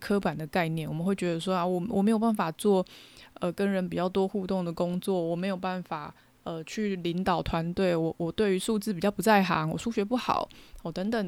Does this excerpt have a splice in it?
no; 0 cuts

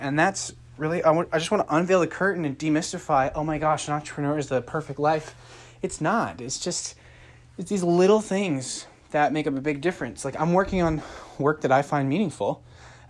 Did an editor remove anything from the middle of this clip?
no; 0 cuts

